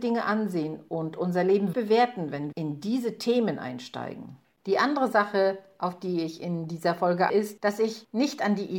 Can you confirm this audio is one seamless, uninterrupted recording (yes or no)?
no